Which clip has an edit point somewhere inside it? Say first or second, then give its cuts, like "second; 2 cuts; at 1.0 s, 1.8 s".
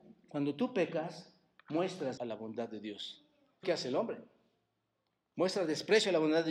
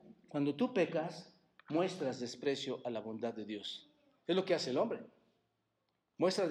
first; 2 cuts; at 2.2 s, 3.6 s